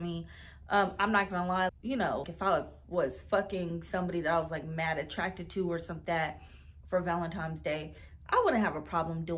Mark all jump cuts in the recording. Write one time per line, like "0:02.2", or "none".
0:01.7
0:02.2
0:06.0

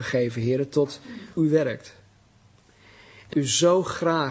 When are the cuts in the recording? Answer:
0:01.4
0:03.3

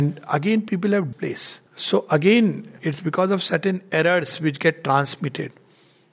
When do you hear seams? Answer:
0:01.1
0:01.7
0:02.8

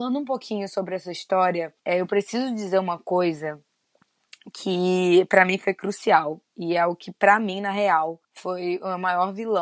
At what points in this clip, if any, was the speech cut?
0:01.8
0:06.4
0:08.2

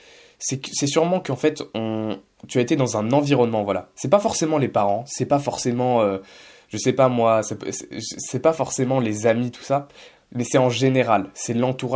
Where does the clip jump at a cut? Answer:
none

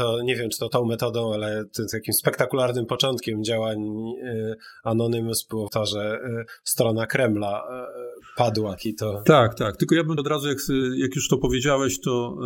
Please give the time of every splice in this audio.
0:05.7
0:08.8
0:10.2

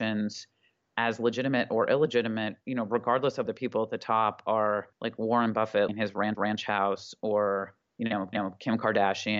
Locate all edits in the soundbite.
0:02.6
0:03.5
0:04.9
0:05.9
0:06.3
0:07.8
0:08.3

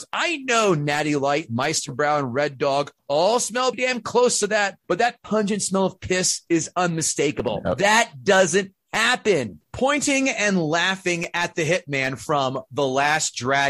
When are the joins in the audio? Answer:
0:03.0
0:03.7
0:04.8
0:09.6

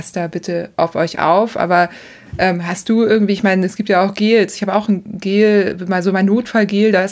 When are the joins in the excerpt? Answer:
none

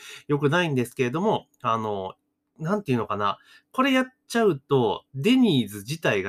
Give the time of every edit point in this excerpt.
0:02.3

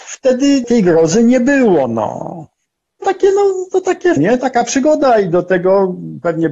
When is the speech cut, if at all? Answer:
0:03.0
0:04.2

